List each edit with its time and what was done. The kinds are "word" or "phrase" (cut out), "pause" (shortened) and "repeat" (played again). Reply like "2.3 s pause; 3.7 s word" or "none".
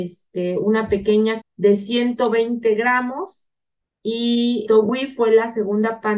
1.4 s word; 4.7 s word